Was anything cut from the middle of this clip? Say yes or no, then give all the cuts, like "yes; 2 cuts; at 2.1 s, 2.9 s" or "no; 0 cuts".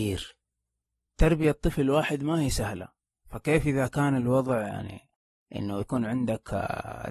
no; 0 cuts